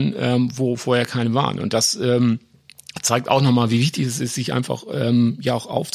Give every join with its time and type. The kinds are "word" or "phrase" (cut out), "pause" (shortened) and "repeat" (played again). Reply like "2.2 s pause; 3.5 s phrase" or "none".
none